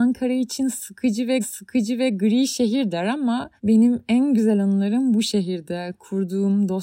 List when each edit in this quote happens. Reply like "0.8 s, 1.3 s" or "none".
1.4 s, 3.6 s